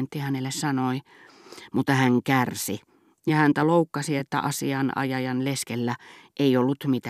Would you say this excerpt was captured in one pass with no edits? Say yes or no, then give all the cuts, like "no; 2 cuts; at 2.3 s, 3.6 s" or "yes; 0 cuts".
yes; 0 cuts